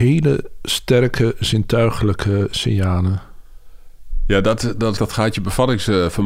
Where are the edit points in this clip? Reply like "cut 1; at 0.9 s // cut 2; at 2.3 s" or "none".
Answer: cut 1; at 5.0 s